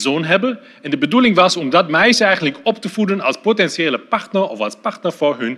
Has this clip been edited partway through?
no; 0 cuts

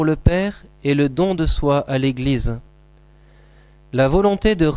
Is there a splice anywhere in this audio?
no; 0 cuts

